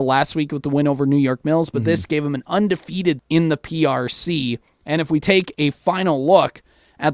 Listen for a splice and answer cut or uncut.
cut